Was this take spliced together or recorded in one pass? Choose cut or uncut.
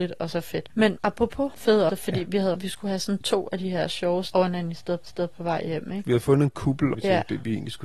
cut